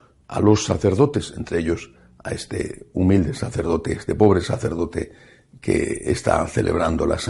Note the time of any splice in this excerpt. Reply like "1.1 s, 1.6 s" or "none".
none